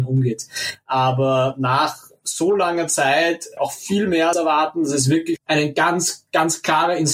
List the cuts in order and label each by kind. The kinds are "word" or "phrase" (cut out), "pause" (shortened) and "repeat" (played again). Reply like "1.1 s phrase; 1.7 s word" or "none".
3.6 s phrase; 4.3 s word; 5.4 s word